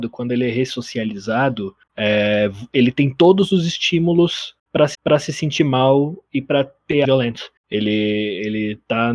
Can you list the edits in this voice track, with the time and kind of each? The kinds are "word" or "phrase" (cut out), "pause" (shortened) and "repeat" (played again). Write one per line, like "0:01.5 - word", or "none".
0:04.9 - repeat
0:07.0 - word